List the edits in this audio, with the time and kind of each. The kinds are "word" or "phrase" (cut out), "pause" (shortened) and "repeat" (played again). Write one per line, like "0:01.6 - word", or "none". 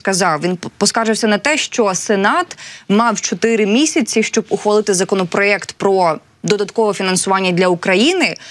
none

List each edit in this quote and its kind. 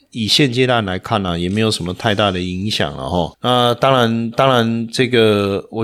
0:04.3 - repeat

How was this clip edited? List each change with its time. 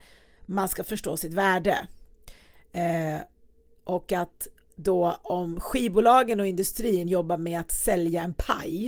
none

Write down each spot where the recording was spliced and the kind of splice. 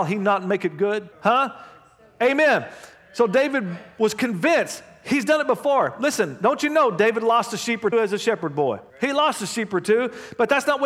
0:01.1 - pause
0:07.9 - word
0:08.9 - pause

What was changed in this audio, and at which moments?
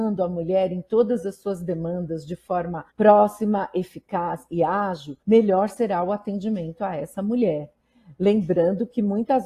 0:02.9 - pause
0:05.2 - pause

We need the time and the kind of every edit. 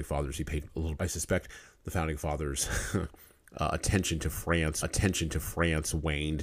0:01.0 - word
0:04.8 - repeat

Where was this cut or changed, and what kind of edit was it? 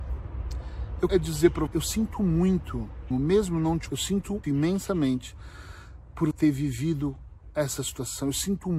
0:01.1 - word
0:01.7 - word
0:03.1 - word
0:03.9 - word
0:04.4 - word
0:06.3 - word

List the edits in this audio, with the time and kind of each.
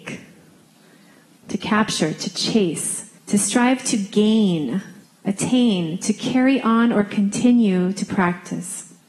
0:03.2 - pause
0:05.0 - pause

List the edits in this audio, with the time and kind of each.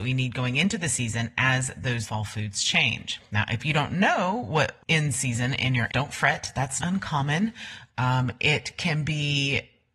0:02.0 - word
0:04.8 - word
0:05.9 - word
0:06.8 - word

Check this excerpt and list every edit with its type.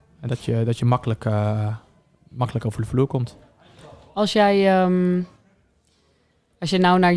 none

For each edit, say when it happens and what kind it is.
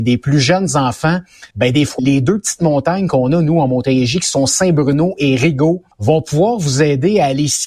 0:01.5 - pause
0:02.0 - word
0:05.9 - pause

